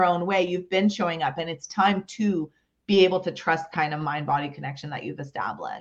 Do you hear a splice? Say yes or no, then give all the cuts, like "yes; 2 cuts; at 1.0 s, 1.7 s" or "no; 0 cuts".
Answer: yes; 1 cut; at 3.7 s